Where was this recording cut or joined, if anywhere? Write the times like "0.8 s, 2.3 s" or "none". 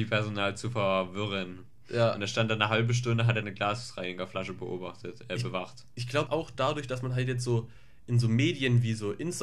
3.4 s, 6.3 s